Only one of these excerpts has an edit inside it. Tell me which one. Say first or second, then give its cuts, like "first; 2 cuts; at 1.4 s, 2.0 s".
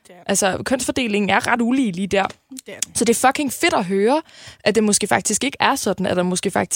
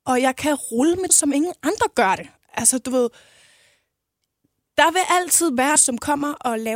second; 2 cuts; at 1.1 s, 5.8 s